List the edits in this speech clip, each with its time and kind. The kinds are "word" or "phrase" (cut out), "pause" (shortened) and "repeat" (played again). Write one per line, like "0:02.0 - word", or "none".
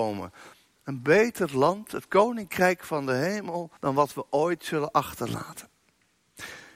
0:03.8 - pause